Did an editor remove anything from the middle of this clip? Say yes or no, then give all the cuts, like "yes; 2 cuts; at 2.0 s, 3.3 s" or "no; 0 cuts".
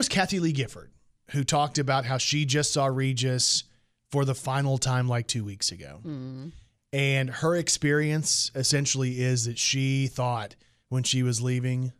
no; 0 cuts